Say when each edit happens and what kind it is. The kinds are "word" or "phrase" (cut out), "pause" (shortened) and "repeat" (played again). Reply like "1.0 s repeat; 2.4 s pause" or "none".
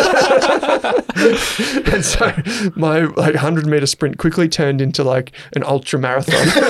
none